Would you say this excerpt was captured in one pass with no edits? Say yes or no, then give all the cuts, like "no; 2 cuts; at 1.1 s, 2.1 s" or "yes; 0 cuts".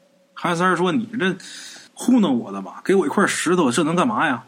no; 1 cut; at 1.9 s